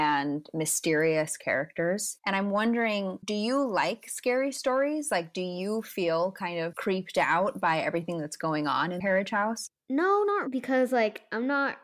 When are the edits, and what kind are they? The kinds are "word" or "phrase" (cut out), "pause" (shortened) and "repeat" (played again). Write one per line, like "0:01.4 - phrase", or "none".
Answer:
0:10.4 - word